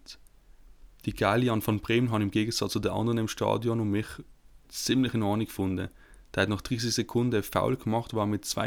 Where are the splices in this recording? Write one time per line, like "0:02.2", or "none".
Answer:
0:04.6